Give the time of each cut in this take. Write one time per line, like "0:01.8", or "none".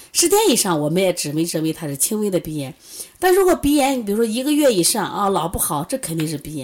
none